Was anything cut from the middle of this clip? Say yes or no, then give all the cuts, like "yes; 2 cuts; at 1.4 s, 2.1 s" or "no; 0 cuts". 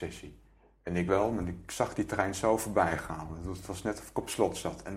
yes; 1 cut; at 1.1 s